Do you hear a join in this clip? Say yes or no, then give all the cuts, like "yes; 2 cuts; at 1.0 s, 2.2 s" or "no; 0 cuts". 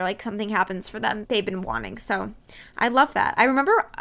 yes; 1 cut; at 1.2 s